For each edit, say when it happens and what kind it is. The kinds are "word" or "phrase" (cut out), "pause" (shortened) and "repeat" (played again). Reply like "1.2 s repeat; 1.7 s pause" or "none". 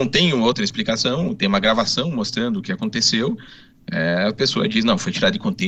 none